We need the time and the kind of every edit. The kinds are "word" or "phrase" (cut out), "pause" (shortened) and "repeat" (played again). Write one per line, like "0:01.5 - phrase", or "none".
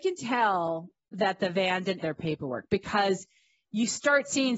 0:02.0 - word